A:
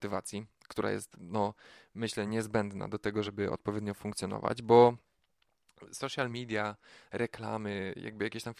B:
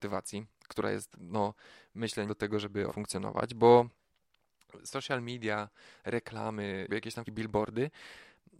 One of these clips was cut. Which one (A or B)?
B